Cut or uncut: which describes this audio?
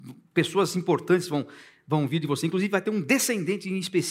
uncut